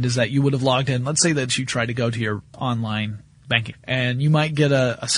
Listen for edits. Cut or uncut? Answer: cut